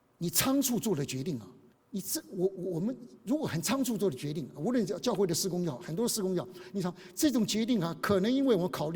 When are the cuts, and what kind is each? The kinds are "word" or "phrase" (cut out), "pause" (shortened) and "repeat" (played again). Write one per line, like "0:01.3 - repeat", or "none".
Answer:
0:01.7 - pause
0:03.2 - pause